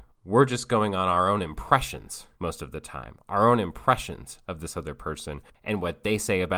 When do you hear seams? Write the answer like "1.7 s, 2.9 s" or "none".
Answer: 2.3 s